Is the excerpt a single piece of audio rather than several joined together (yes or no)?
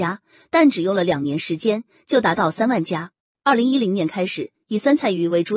yes